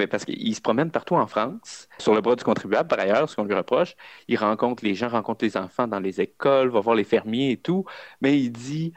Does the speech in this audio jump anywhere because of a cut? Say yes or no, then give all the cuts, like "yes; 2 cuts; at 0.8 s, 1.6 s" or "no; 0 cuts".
yes; 1 cut; at 2.0 s